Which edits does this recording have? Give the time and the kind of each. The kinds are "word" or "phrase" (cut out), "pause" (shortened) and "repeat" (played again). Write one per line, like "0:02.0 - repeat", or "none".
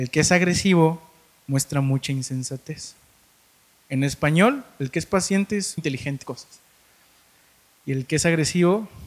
0:05.8 - word
0:06.2 - phrase

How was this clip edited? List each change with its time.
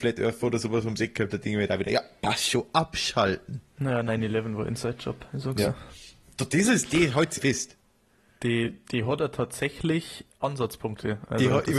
0:07.4 - word

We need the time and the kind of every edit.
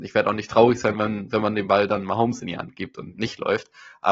none

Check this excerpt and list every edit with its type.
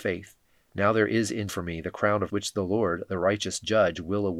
0:01.5 - word
0:02.3 - word

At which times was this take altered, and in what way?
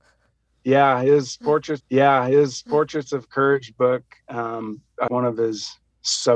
0:01.8 - repeat
0:05.1 - word

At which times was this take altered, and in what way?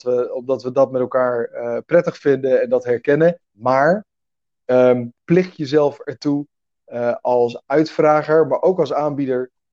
0:03.4 - pause
0:05.2 - pause

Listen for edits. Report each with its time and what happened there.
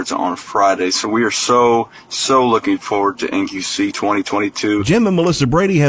none

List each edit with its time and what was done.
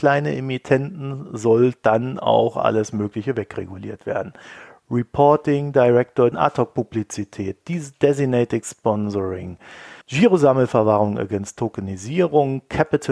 0:06.3 - phrase
0:10.0 - pause

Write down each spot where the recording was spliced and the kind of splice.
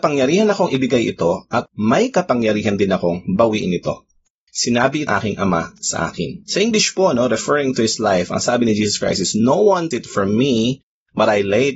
0:01.7 - pause
0:05.1 - phrase
0:06.4 - pause
0:09.9 - word

